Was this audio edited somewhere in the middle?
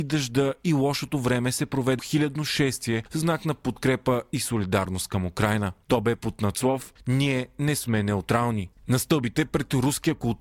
yes; 1 cut; at 2.0 s

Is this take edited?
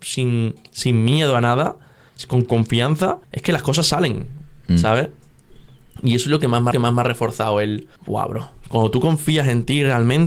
yes; 3 cuts; at 3.2 s, 6.7 s, 8.0 s

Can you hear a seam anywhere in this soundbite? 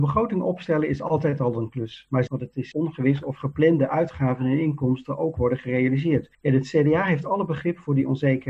yes; 3 cuts; at 2.3 s, 2.7 s, 6.3 s

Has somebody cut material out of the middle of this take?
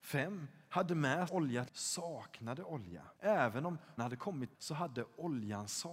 yes; 5 cuts; at 1.3 s, 1.7 s, 3.2 s, 4.0 s, 4.5 s

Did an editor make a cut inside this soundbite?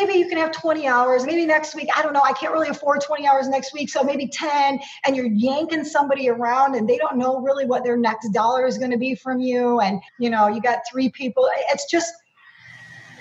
yes; 2 cuts; at 1.3 s, 10.1 s

